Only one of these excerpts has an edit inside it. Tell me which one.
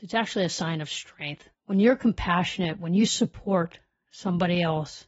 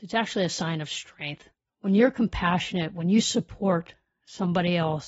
first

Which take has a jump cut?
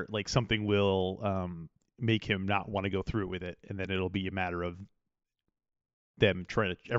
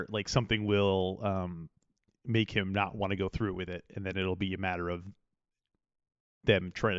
first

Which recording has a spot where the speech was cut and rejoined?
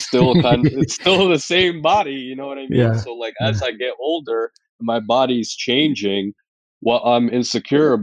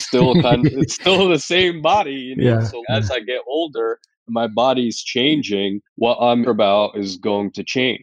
second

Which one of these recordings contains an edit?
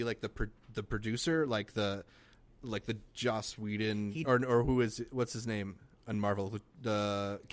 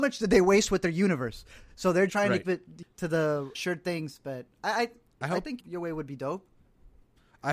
second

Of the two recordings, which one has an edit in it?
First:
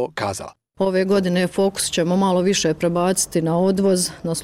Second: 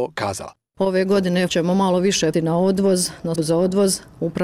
second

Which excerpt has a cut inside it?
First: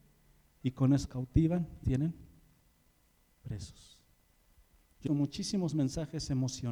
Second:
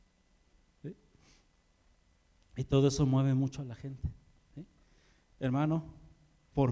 first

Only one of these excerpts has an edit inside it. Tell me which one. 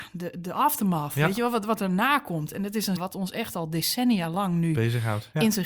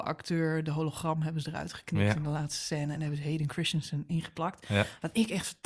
first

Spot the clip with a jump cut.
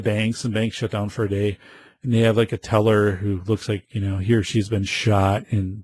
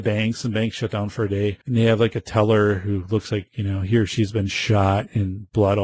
second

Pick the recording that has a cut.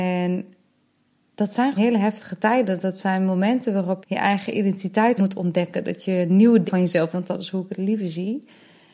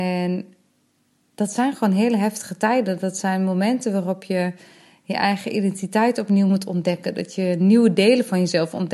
first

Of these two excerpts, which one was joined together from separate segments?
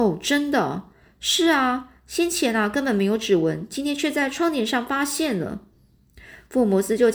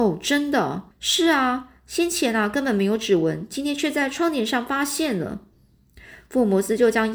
second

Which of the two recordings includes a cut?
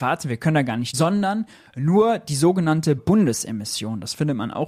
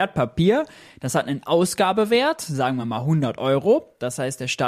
first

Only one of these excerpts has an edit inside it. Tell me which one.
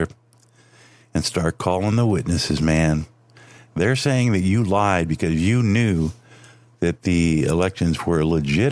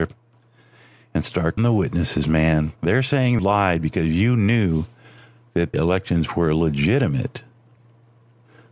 second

